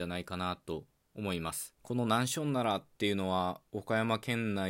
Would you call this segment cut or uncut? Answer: cut